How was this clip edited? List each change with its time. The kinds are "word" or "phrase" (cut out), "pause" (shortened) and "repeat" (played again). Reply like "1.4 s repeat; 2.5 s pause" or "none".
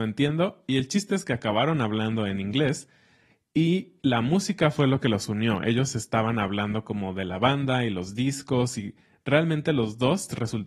none